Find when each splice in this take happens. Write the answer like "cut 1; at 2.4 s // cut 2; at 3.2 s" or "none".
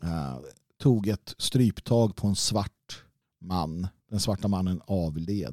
none